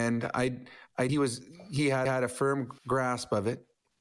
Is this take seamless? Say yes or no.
no